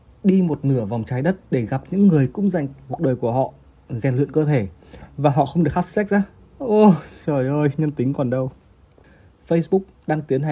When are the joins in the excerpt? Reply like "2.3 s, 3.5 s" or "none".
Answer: 2.9 s